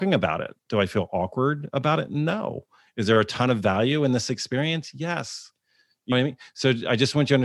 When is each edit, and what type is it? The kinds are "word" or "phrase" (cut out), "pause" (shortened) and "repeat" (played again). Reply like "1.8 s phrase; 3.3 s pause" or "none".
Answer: 6.1 s word